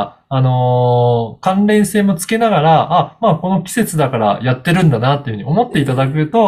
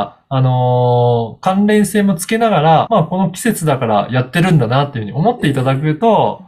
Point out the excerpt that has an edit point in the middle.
second; 1 cut; at 2.9 s

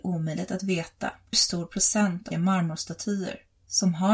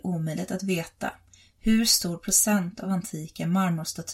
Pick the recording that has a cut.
first; 2 cuts; at 1.3 s, 2.3 s

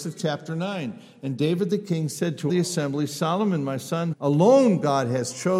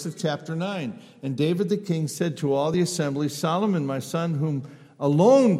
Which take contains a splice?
first; 2 cuts; at 2.5 s, 4.1 s

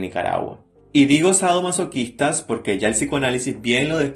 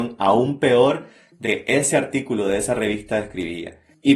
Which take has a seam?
second; 1 cut; at 1.4 s

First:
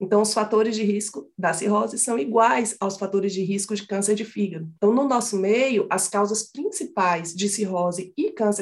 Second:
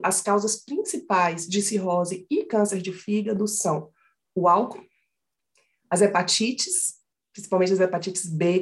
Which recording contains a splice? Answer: first; 1 cut; at 4.8 s

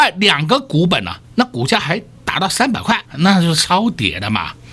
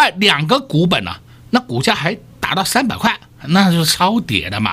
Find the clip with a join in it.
first; 2 cuts; at 1.2 s, 3.1 s

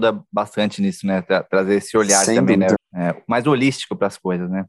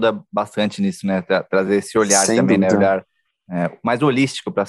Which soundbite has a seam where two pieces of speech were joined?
first; 1 cut; at 2.8 s

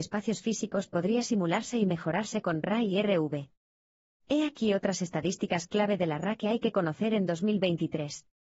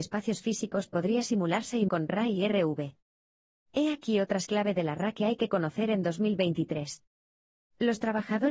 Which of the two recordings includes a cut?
second; 2 cuts; at 1.9 s, 4.4 s

